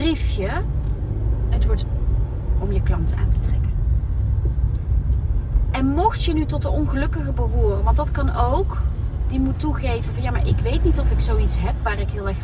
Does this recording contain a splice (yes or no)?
yes